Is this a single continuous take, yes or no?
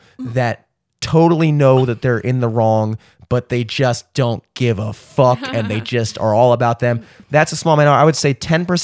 yes